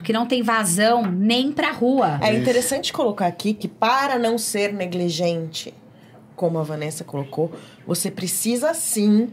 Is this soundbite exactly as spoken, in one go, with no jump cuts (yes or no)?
yes